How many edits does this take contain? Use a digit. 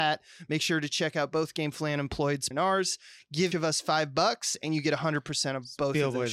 2